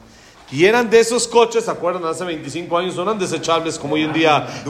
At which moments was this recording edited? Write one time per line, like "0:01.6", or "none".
none